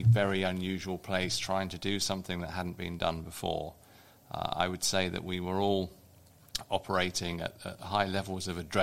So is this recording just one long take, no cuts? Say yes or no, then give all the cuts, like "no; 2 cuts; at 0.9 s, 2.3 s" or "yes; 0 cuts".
yes; 0 cuts